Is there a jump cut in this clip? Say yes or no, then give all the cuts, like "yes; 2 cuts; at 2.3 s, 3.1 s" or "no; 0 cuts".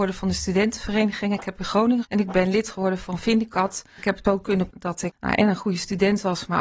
yes; 3 cuts; at 2.0 s, 4.2 s, 4.7 s